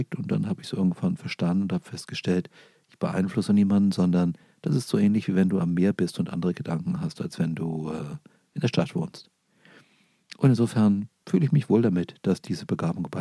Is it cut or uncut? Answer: uncut